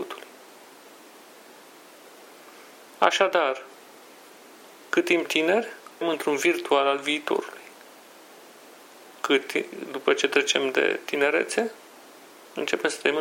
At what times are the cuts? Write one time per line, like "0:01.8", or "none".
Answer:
0:05.2
0:06.0